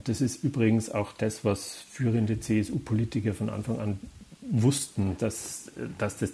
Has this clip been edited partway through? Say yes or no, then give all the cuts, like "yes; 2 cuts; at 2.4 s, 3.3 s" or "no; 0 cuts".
no; 0 cuts